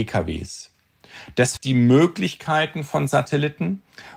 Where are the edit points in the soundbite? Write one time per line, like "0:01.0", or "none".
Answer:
0:01.6